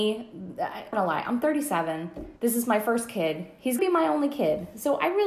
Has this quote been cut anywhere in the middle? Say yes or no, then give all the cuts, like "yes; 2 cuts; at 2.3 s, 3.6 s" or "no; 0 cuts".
yes; 3 cuts; at 0.9 s, 2.4 s, 3.8 s